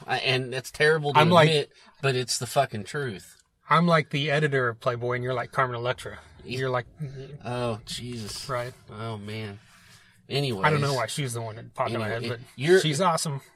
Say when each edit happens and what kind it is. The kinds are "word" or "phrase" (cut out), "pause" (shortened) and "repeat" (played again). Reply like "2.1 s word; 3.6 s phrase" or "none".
none